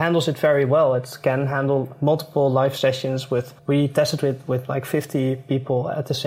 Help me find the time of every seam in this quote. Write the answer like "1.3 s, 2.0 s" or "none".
3.6 s